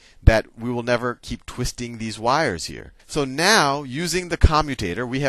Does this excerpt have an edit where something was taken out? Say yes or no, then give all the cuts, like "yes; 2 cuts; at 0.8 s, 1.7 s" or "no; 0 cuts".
yes; 1 cut; at 3.0 s